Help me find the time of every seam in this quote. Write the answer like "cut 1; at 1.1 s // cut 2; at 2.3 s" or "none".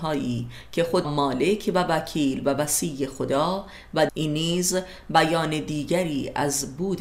cut 1; at 1.0 s // cut 2; at 4.1 s